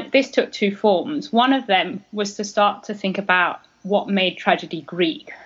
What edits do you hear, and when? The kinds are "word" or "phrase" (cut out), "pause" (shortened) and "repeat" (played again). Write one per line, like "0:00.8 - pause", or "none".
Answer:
none